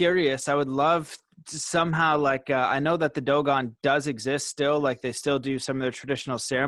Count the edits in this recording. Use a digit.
0